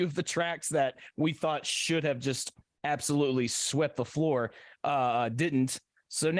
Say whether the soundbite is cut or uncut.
uncut